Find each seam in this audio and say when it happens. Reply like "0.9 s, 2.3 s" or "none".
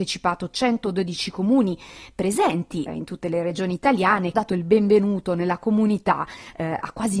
2.9 s, 4.3 s